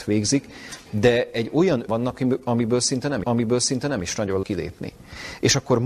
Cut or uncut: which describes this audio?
cut